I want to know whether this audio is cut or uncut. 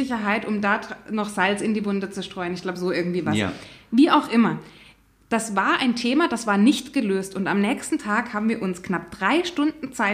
uncut